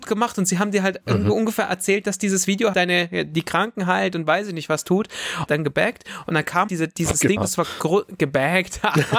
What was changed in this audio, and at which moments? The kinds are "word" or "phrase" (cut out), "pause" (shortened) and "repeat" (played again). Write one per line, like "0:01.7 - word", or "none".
0:02.7 - word
0:05.5 - phrase
0:06.7 - word
0:07.4 - phrase